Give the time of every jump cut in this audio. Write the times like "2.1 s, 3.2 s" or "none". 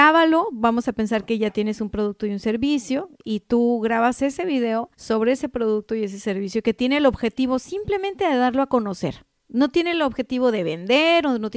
4.9 s